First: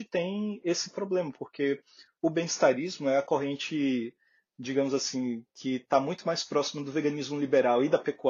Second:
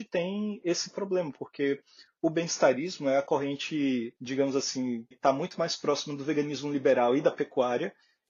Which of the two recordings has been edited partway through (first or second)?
second